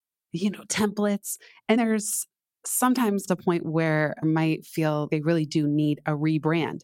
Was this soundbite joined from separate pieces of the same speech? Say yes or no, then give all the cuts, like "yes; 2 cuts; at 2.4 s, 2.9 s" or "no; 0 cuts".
yes; 4 cuts; at 1.8 s, 3.3 s, 4.2 s, 5.1 s